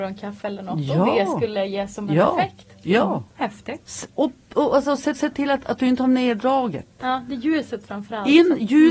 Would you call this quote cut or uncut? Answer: cut